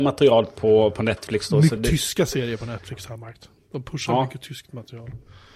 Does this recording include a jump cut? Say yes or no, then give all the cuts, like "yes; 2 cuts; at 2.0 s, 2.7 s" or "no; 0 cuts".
yes; 1 cut; at 1.8 s